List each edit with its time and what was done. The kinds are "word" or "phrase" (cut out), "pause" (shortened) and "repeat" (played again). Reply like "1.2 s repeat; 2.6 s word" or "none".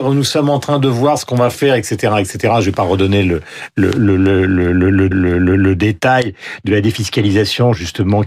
5.1 s repeat